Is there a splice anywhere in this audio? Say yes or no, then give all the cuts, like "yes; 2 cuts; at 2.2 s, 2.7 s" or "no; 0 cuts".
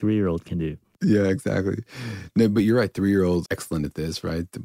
yes; 1 cut; at 3.5 s